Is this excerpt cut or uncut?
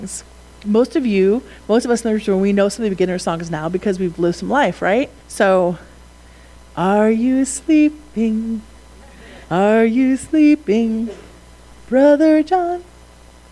cut